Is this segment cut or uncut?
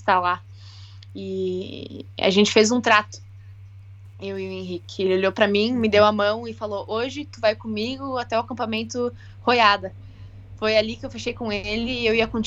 uncut